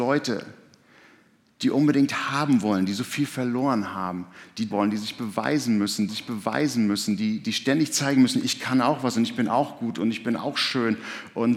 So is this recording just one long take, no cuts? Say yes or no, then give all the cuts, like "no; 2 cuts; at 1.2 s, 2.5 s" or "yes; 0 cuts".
no; 2 cuts; at 4.7 s, 6.1 s